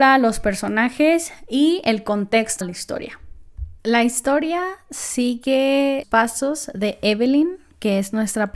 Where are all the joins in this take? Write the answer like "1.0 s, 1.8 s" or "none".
2.6 s, 3.8 s, 6.0 s